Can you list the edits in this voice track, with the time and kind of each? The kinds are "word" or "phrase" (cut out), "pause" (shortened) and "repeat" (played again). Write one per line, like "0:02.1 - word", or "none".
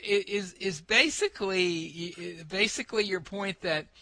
none